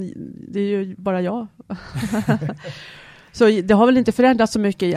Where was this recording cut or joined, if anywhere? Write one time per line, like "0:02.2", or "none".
none